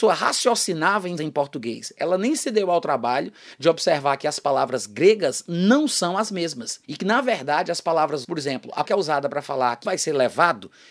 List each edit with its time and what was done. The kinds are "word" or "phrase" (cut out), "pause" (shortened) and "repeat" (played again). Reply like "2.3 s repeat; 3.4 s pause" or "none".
1.2 s phrase; 6.8 s pause; 8.2 s word; 8.8 s word; 9.8 s word